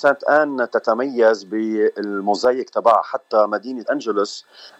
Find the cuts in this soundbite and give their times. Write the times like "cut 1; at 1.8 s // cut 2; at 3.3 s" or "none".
cut 1; at 3.8 s

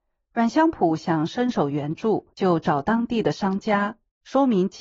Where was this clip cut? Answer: cut 1; at 2.3 s

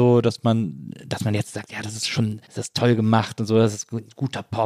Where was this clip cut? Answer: cut 1; at 2.4 s

